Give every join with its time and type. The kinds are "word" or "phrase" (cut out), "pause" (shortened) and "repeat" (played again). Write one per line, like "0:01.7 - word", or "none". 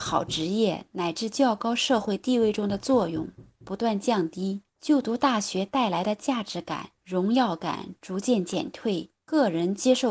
0:04.7 - pause
0:07.0 - pause
0:09.2 - pause